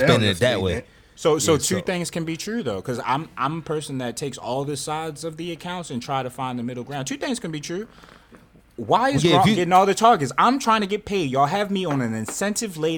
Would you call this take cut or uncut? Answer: uncut